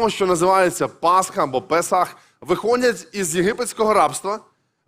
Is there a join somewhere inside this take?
no; 0 cuts

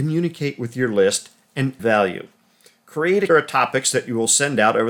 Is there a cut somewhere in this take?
yes; 2 cuts; at 1.8 s, 3.3 s

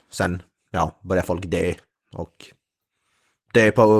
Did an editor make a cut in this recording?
no; 0 cuts

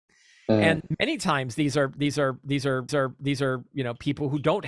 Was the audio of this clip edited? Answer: yes; 1 cut; at 2.9 s

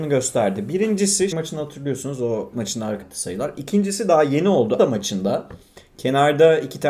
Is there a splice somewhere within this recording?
yes; 4 cuts; at 1.3 s, 2.5 s, 3.0 s, 4.8 s

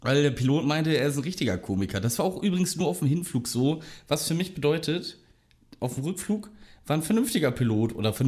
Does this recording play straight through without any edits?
yes; 0 cuts

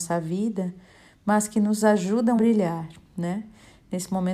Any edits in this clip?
yes; 1 cut; at 2.4 s

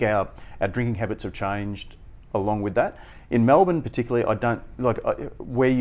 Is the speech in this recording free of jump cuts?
yes; 0 cuts

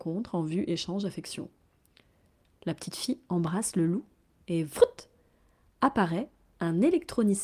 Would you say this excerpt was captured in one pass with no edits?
yes; 0 cuts

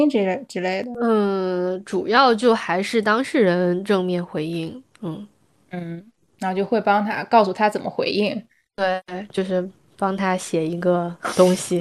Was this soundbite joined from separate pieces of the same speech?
no; 0 cuts

